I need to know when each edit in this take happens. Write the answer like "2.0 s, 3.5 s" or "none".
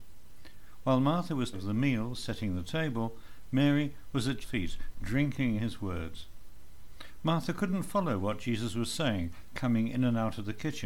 1.5 s, 4.4 s, 5.6 s

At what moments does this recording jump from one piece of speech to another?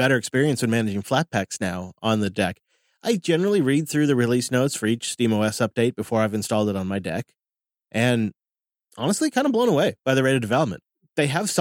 none

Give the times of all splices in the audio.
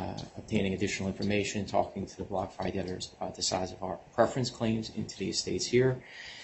none

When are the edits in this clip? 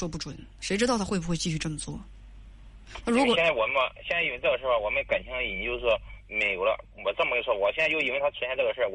6.2 s

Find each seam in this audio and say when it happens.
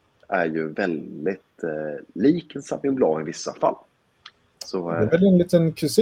none

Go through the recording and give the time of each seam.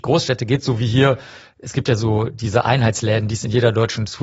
none

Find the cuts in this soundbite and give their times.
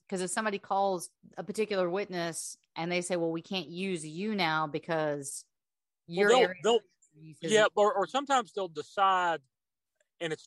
none

